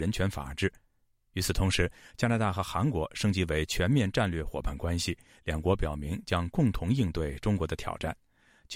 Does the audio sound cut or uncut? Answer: uncut